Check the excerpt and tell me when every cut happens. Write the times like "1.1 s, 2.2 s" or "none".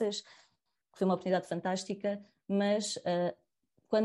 none